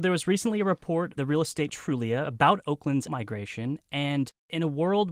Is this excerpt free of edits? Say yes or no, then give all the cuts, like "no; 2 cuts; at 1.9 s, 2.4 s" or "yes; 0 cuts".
no; 3 cuts; at 1.2 s, 1.7 s, 3.1 s